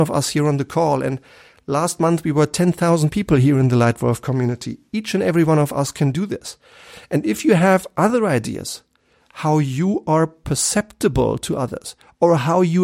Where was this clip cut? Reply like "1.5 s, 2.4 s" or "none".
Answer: none